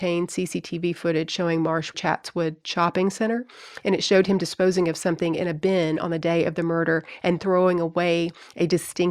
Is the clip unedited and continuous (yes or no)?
no